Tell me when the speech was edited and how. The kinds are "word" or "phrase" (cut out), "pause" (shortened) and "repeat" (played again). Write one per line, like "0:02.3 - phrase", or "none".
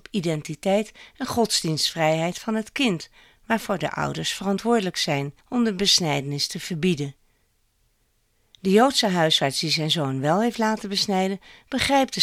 0:05.4 - pause